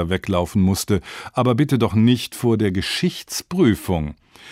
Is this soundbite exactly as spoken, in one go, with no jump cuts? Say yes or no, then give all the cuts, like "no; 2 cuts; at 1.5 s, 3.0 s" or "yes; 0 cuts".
yes; 0 cuts